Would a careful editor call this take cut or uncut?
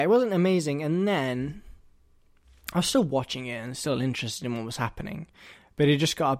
uncut